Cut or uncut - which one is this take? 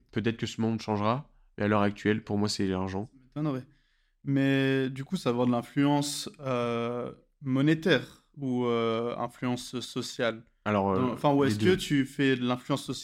uncut